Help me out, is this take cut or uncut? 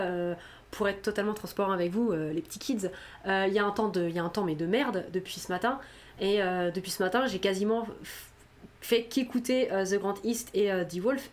uncut